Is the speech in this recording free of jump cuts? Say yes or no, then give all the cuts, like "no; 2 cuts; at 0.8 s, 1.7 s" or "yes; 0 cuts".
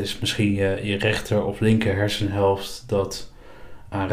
yes; 0 cuts